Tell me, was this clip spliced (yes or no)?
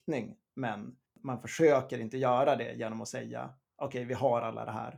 yes